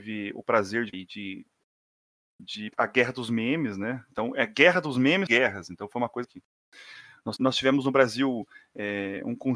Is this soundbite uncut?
no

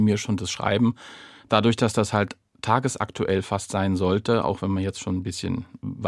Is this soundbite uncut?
yes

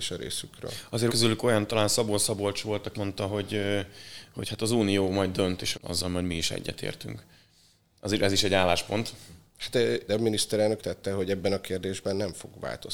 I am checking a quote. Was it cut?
yes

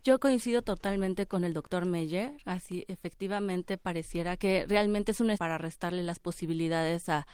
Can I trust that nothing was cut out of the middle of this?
no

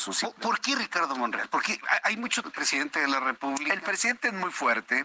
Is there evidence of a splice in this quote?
yes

